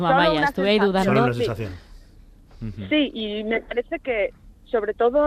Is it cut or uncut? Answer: uncut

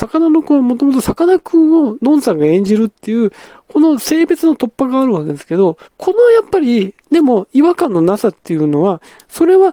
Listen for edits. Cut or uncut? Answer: cut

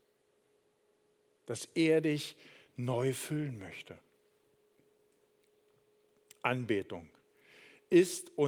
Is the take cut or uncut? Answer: uncut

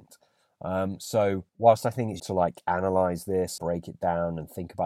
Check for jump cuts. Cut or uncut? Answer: cut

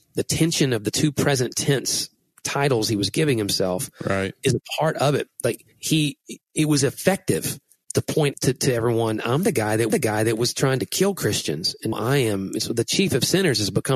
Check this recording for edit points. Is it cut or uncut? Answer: cut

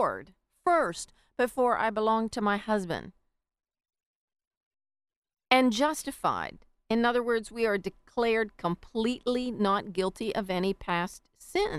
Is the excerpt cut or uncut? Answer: uncut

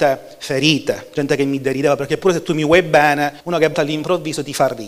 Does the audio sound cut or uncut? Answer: cut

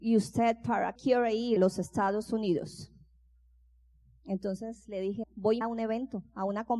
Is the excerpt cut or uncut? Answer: cut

